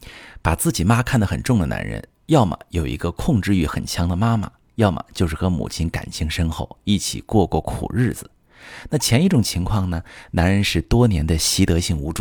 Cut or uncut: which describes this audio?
uncut